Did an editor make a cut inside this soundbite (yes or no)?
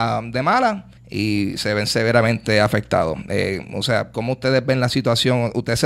yes